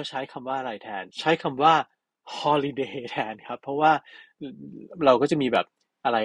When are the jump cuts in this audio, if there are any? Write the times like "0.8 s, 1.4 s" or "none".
1.1 s